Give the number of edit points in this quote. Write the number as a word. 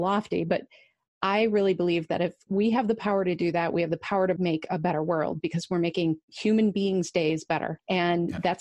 one